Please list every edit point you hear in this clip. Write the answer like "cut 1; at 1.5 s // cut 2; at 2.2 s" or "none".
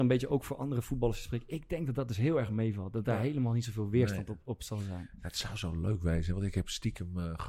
none